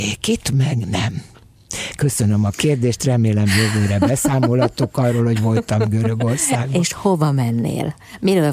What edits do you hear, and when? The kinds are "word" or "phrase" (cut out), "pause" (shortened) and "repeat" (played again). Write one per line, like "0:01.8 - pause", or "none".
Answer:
none